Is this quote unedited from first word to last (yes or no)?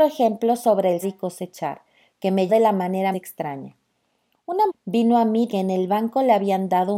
no